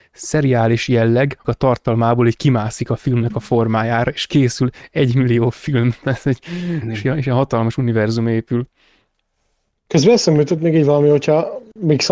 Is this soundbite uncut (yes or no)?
no